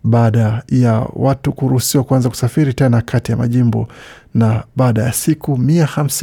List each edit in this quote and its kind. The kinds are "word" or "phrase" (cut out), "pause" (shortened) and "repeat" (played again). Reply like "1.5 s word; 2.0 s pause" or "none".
none